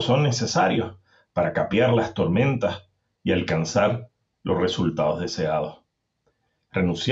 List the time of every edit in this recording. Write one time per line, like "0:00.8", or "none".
none